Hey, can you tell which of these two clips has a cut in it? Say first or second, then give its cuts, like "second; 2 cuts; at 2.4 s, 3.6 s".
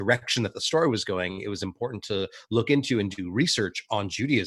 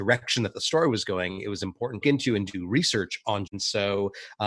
second; 2 cuts; at 2.0 s, 3.5 s